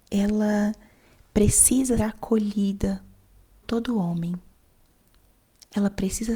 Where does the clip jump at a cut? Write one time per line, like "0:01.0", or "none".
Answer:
0:02.0
0:03.6